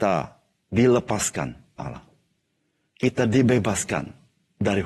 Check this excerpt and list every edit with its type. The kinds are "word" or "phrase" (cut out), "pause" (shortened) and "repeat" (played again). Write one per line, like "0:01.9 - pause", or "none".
0:01.8 - phrase